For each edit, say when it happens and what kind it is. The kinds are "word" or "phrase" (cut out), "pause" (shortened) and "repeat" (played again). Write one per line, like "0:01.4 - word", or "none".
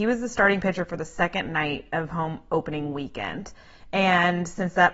none